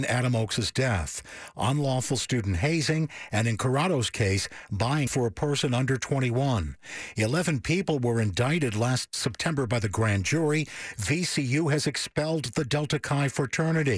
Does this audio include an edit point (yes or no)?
yes